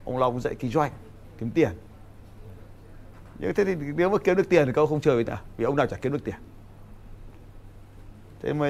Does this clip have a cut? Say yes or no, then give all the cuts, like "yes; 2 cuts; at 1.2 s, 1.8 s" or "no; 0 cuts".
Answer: yes; 1 cut; at 5.3 s